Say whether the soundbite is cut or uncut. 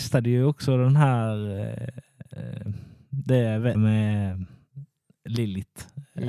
cut